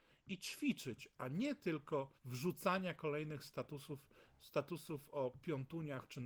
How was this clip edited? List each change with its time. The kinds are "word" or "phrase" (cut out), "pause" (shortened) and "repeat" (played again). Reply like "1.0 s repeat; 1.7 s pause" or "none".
2.2 s pause